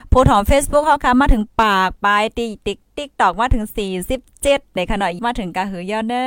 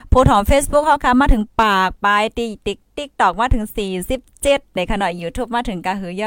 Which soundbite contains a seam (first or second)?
first